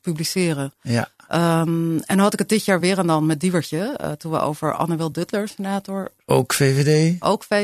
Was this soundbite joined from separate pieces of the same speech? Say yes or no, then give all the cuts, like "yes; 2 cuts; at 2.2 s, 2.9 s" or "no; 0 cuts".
no; 0 cuts